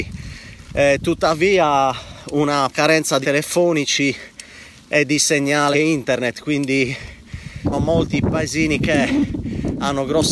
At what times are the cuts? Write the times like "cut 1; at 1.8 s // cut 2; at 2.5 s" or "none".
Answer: cut 1; at 2.7 s // cut 2; at 3.2 s // cut 3; at 5.7 s // cut 4; at 7.7 s